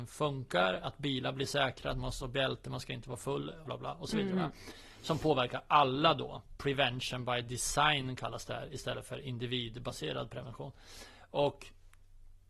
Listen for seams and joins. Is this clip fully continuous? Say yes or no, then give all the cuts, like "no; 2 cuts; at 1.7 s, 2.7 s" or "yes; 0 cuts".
no; 1 cut; at 3.7 s